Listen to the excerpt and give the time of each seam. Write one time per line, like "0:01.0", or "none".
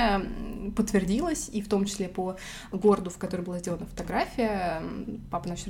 none